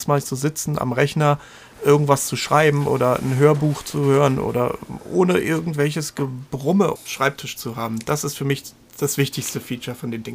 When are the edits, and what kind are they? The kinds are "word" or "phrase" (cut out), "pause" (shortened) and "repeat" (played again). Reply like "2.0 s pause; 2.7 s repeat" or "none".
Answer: 7.0 s word